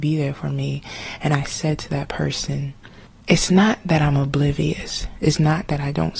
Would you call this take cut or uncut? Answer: uncut